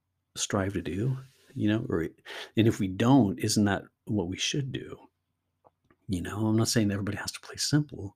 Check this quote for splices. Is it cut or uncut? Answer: uncut